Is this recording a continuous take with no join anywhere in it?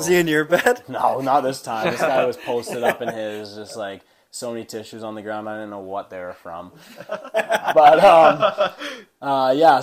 yes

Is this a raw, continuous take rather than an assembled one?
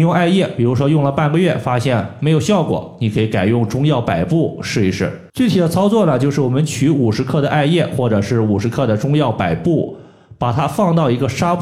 no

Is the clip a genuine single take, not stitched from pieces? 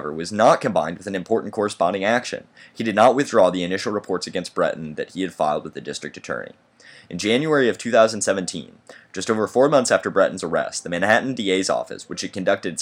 yes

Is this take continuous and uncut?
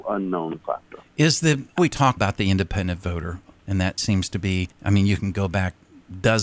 no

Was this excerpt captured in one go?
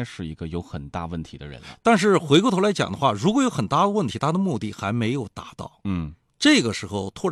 yes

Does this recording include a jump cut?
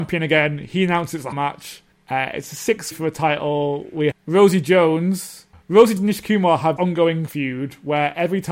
yes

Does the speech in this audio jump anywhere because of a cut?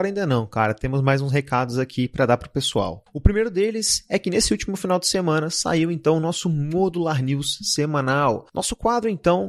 no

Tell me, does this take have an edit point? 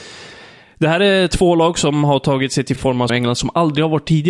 yes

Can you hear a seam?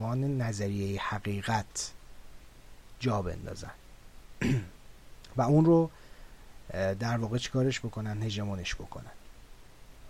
yes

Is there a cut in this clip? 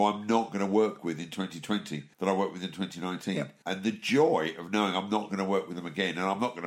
yes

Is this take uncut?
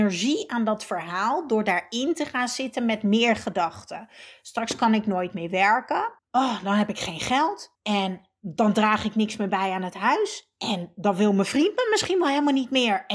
no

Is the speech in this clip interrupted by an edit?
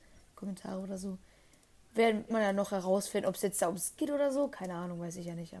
yes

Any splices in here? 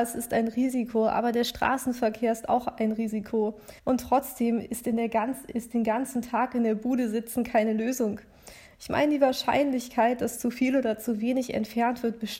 yes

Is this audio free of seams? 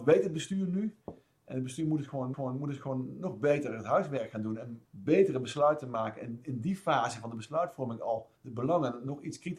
no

